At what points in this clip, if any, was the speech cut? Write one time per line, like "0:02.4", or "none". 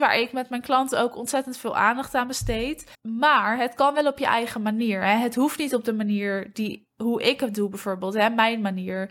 0:02.9